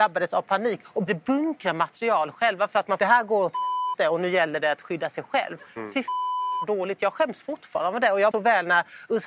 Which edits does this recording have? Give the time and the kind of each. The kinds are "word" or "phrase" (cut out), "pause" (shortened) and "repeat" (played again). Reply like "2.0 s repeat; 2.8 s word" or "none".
1.1 s word; 3.0 s phrase; 8.3 s word